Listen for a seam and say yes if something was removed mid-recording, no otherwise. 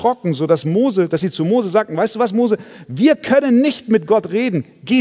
no